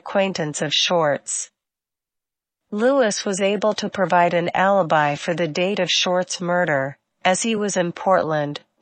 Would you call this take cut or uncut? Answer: uncut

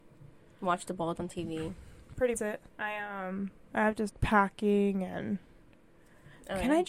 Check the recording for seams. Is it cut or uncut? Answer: cut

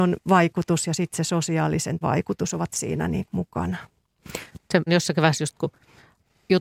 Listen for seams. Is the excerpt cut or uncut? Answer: cut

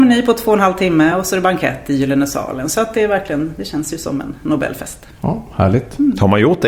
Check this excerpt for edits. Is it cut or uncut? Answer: uncut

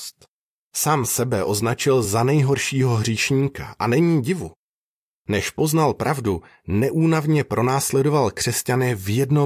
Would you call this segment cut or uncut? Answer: uncut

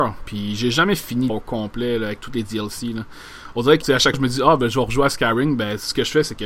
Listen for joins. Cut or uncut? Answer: cut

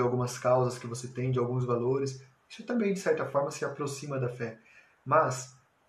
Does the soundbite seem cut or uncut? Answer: uncut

